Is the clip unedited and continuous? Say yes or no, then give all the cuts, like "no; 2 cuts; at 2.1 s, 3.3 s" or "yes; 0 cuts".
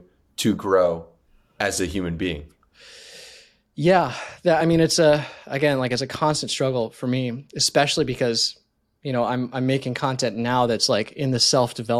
yes; 0 cuts